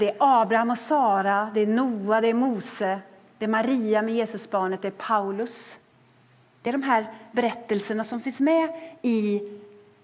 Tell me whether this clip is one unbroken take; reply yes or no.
yes